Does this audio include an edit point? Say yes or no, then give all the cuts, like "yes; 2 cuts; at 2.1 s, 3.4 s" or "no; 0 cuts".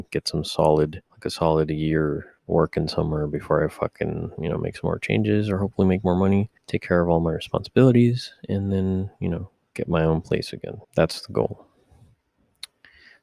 yes; 5 cuts; at 1.1 s, 2.4 s, 6.6 s, 9.7 s, 10.8 s